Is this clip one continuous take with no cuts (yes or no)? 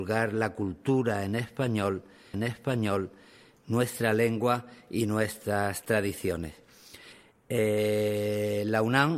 no